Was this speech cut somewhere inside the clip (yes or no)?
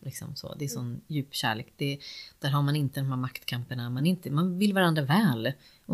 no